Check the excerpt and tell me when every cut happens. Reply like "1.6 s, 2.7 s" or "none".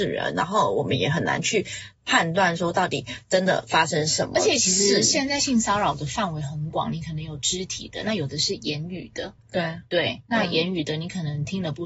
9.4 s